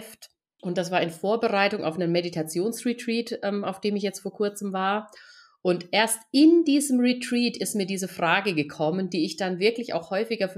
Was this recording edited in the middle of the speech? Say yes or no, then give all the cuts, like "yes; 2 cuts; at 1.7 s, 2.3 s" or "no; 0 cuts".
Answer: no; 0 cuts